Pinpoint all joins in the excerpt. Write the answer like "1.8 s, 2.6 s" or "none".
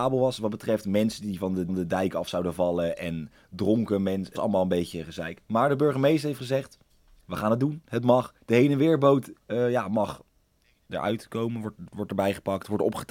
1.7 s, 4.4 s, 6.9 s, 8.4 s, 9.4 s, 11.9 s